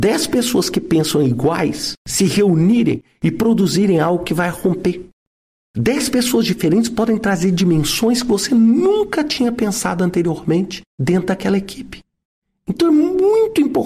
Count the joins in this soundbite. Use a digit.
0